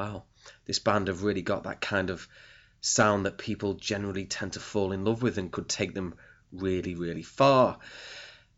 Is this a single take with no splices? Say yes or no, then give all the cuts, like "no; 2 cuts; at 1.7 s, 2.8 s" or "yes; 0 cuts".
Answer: yes; 0 cuts